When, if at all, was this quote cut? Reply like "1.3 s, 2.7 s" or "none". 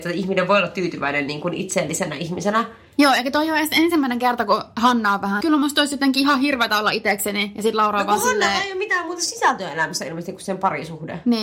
5.4 s